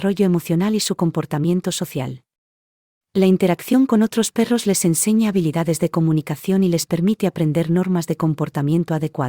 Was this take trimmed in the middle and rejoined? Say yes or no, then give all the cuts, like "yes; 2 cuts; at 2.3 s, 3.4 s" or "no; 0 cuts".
no; 0 cuts